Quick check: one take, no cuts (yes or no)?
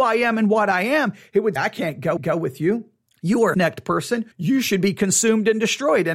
no